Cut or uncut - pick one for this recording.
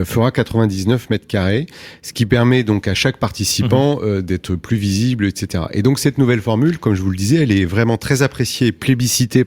uncut